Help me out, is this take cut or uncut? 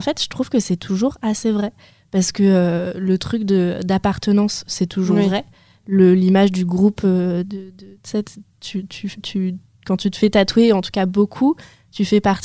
uncut